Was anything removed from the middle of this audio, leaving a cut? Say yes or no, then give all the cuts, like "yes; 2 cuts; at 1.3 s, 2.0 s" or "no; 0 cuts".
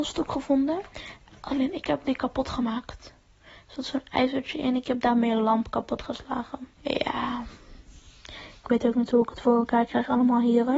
yes; 1 cut; at 6.7 s